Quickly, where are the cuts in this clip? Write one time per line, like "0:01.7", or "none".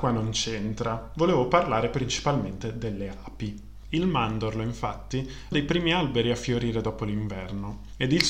0:05.5